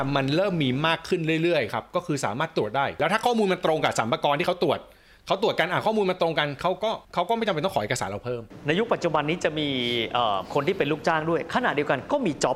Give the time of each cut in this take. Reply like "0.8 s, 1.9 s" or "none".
7.0 s